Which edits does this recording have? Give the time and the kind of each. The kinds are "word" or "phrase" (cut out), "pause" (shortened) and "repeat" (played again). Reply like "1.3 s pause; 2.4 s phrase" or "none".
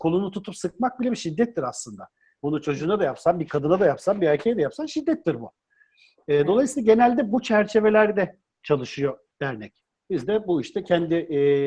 none

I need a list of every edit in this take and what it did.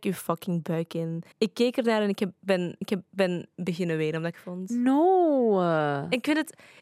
1.3 s pause; 2.8 s repeat; 4.3 s phrase

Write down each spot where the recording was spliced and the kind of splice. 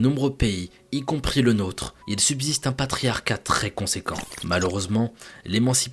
2.0 s pause

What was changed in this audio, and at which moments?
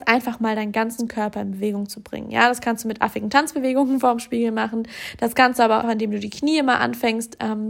5.8 s word

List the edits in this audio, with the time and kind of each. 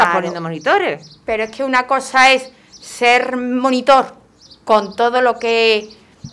none

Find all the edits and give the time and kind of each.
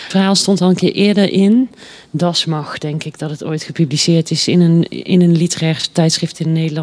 none

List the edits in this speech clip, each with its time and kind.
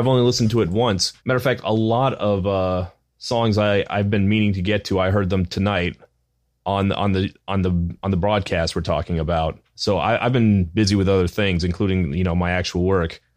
1.2 s pause; 3.1 s pause; 9.6 s pause

